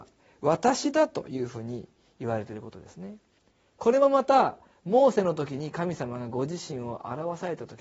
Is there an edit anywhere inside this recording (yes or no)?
no